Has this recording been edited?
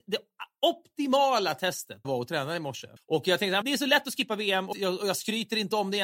yes; 4 cuts; at 2.0 s, 3.0 s, 3.6 s, 4.7 s

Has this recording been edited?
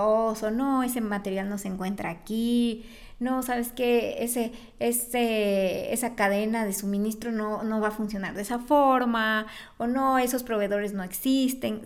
no; 0 cuts

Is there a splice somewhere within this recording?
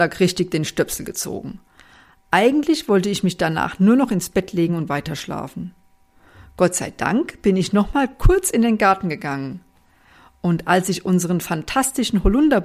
no; 0 cuts

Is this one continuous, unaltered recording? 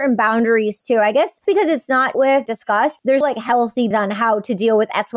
no; 4 cuts; at 2.1 s, 2.5 s, 3.2 s, 3.9 s

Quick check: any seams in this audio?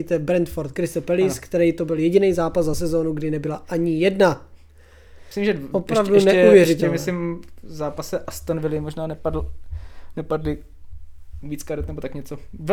no; 0 cuts

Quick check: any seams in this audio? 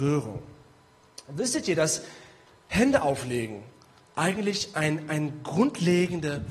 no; 0 cuts

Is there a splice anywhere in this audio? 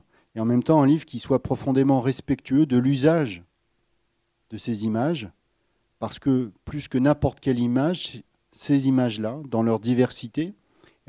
no; 0 cuts

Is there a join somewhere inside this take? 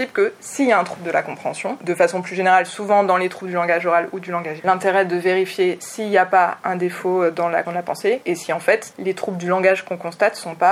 yes; 2 cuts; at 4.6 s, 7.6 s

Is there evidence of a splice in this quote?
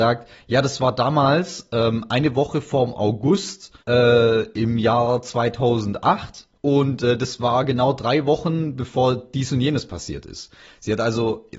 yes; 2 cuts; at 3.8 s, 6.5 s

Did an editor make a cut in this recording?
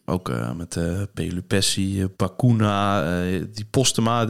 yes; 1 cut; at 2.1 s

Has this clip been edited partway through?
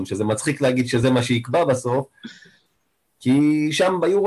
no; 0 cuts

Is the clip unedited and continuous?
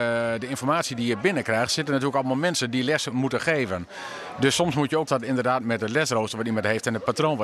no; 1 cut; at 5.1 s

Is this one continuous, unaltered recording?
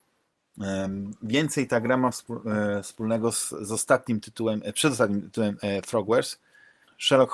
yes; 0 cuts

